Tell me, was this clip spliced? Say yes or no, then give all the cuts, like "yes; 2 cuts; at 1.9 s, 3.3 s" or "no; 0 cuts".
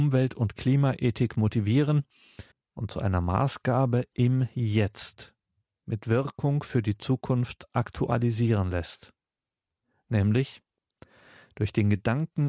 yes; 1 cut; at 2.5 s